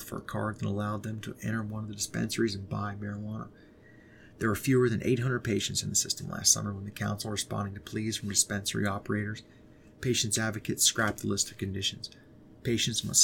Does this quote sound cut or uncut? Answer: uncut